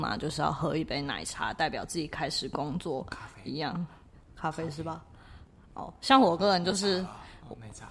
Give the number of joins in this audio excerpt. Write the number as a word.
zero